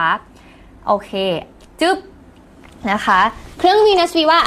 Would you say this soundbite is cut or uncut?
uncut